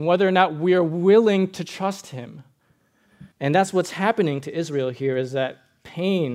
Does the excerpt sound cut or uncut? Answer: cut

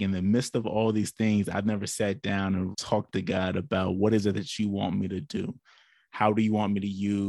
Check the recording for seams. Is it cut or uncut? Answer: cut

